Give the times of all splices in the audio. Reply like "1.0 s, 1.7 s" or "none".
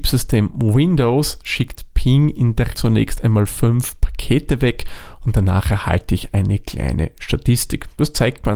2.7 s

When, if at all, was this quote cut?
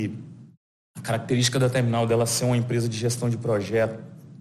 none

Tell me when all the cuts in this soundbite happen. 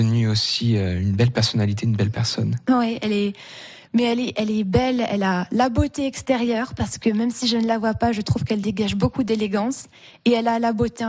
none

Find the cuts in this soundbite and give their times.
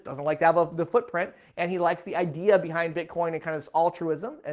none

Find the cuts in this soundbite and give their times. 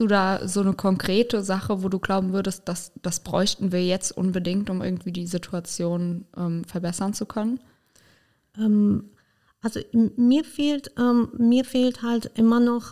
none

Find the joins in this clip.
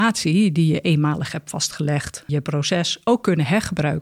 2.3 s

